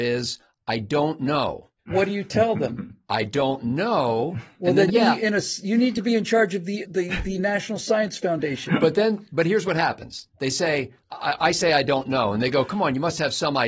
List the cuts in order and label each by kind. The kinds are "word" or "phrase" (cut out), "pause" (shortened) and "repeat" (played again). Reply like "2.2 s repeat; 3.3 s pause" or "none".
1.8 s pause; 4.9 s phrase; 6.8 s word; 11.0 s pause